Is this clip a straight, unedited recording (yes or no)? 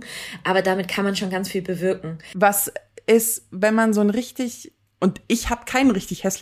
yes